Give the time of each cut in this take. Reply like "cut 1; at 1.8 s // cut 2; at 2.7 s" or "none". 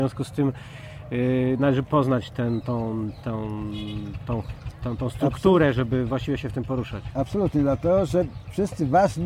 none